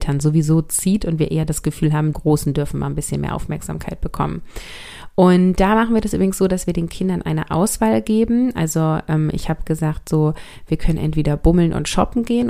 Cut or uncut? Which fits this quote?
cut